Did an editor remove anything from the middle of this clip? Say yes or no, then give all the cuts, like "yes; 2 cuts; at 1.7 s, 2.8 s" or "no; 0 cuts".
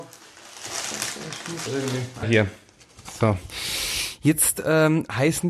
yes; 2 cuts; at 1.7 s, 2.2 s